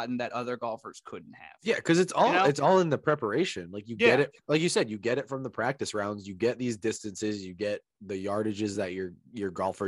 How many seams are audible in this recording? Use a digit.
0